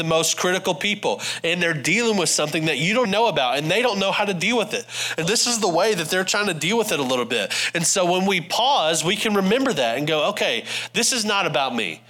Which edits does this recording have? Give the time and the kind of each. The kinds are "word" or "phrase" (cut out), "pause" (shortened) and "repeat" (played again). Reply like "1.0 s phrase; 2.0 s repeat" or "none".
3.0 s word; 5.2 s word

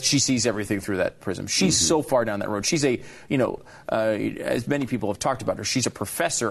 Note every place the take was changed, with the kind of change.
1.2 s word

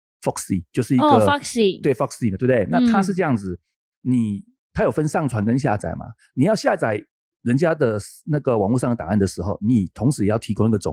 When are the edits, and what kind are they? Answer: none

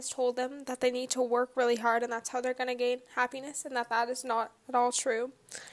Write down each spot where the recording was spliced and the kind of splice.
none

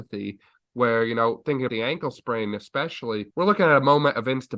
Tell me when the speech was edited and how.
1.7 s word; 3.3 s pause

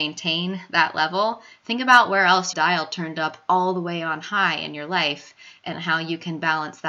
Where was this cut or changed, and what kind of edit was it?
2.5 s phrase

